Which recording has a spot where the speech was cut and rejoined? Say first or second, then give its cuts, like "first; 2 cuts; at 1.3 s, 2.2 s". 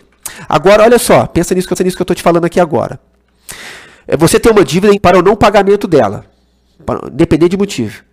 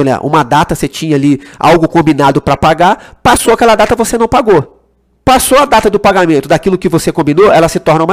first; 2 cuts; at 1.8 s, 5.0 s